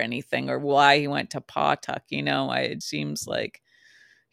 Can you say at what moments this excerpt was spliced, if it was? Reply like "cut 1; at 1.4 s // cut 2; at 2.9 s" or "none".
cut 1; at 2.8 s